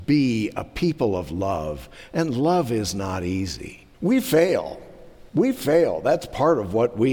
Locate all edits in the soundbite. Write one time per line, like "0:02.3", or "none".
0:03.9
0:05.3